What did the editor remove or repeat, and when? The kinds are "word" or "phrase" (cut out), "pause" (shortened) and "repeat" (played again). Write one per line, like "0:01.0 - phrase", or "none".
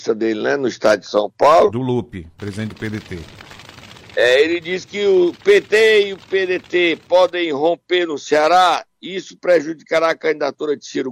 none